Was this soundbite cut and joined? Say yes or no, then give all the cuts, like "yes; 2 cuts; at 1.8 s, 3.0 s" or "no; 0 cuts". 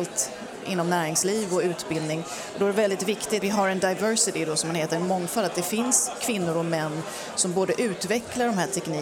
yes; 1 cut; at 3.4 s